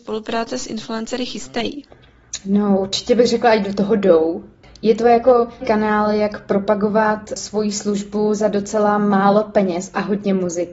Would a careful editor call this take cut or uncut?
cut